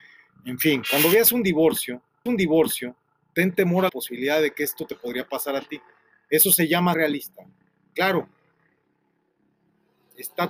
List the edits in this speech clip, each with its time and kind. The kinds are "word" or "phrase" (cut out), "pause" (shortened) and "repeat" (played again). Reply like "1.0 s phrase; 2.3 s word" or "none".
2.3 s repeat; 3.9 s word; 6.9 s word